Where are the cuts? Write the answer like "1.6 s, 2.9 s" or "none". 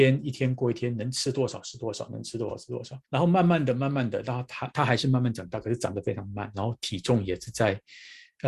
3.0 s